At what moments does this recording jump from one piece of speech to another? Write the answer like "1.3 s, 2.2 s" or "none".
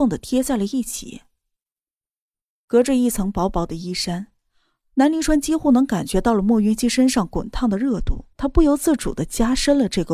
8.3 s